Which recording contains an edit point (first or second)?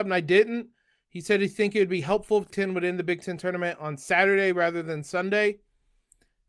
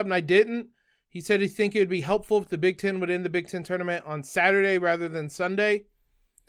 first